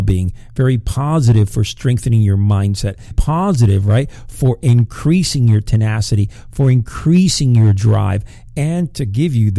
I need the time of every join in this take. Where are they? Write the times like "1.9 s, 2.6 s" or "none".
3.1 s

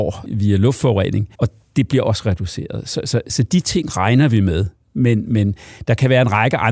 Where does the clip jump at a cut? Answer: 1.3 s

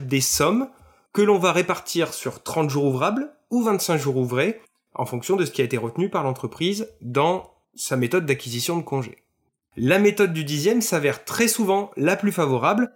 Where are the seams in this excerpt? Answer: none

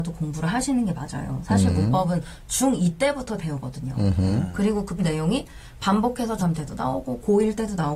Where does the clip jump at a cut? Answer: 3.4 s, 5.0 s, 6.4 s

